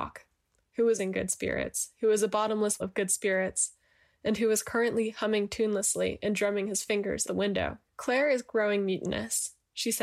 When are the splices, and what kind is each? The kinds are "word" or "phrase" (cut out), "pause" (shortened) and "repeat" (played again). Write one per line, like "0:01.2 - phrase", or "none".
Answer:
0:01.0 - word
0:02.8 - word
0:07.3 - word
0:07.9 - pause